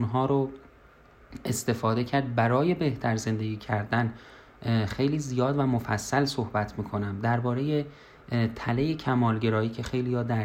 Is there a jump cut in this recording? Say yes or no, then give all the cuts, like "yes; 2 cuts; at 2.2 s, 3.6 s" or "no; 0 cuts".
no; 0 cuts